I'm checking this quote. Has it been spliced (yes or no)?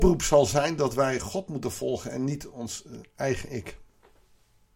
no